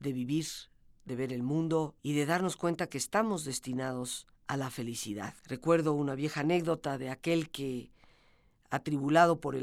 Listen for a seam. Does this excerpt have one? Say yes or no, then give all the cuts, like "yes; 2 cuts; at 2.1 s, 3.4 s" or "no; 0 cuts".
yes; 3 cuts; at 2.0 s, 4.4 s, 5.4 s